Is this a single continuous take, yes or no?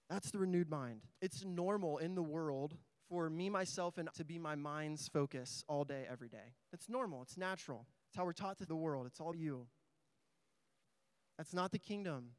no